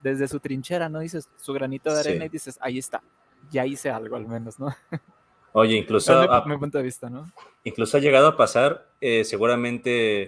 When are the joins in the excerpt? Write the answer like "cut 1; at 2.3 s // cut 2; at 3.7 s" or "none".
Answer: none

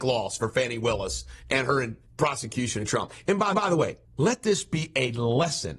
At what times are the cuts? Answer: cut 1; at 2.1 s // cut 2; at 3.5 s // cut 3; at 4.0 s

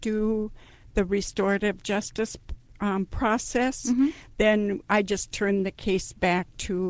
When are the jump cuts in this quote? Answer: none

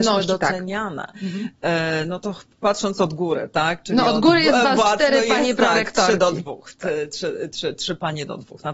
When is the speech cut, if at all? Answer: none

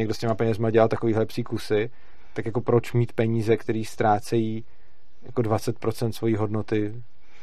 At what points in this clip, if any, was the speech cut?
none

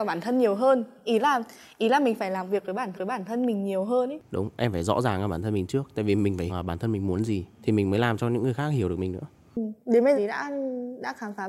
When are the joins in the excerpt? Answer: cut 1; at 2.9 s // cut 2; at 6.5 s // cut 3; at 7.5 s // cut 4; at 9.8 s // cut 5; at 10.1 s

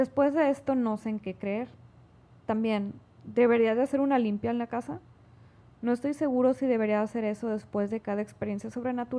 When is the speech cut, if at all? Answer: none

